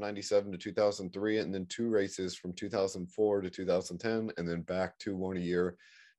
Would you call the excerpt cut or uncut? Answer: uncut